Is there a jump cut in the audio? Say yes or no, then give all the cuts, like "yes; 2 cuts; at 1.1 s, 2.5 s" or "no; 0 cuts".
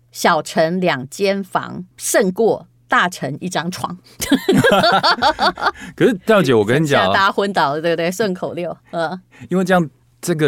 yes; 1 cut; at 1.9 s